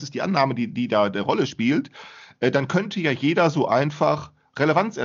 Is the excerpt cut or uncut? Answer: uncut